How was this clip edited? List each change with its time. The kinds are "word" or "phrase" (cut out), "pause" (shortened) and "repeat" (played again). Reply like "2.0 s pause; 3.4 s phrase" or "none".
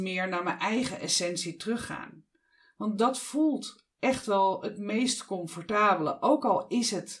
none